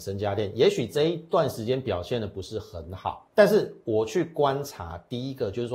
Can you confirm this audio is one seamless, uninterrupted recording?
no; 1 cut; at 3.3 s

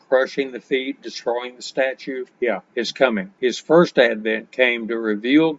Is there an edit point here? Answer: yes; 1 cut; at 2.3 s

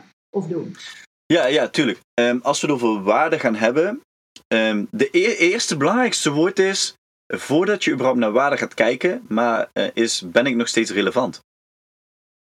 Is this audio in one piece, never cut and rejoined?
yes; 0 cuts

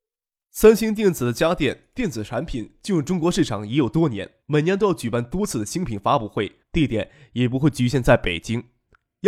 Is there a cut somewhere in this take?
yes; 2 cuts; at 4.4 s, 6.6 s

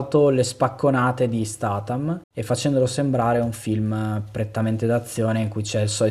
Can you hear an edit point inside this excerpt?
yes; 1 cut; at 2.2 s

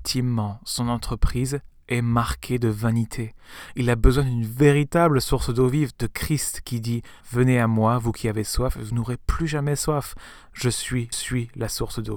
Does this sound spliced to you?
yes; 2 cuts; at 7.2 s, 11.1 s

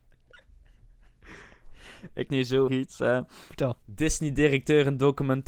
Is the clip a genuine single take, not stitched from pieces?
no; 3 cuts; at 2.3 s, 2.7 s, 3.8 s

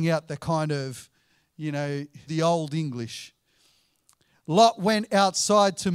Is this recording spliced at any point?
yes; 1 cut; at 2.3 s

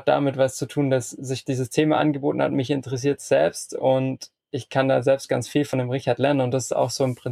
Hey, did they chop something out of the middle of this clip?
no; 0 cuts

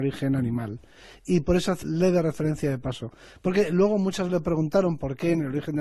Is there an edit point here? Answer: yes; 2 cuts; at 1.8 s, 4.3 s

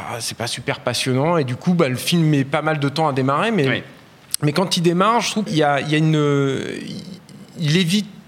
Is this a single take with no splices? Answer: no; 1 cut; at 5.5 s

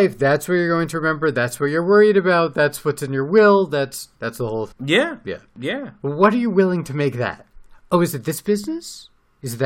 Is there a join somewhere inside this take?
yes; 2 cuts; at 4.2 s, 4.7 s

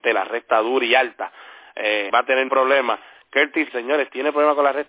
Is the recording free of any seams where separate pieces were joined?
no; 3 cuts; at 2.1 s, 2.5 s, 3.7 s

